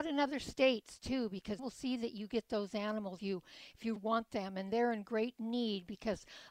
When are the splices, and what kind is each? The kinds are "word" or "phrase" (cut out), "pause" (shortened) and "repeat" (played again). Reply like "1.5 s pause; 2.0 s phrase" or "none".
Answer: 1.6 s word; 3.2 s word; 4.0 s word